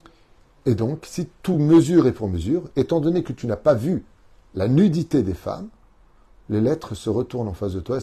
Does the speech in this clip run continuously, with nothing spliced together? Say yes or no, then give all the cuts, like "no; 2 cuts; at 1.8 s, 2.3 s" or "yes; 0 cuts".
yes; 0 cuts